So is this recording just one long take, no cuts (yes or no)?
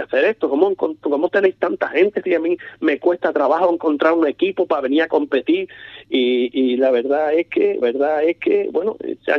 no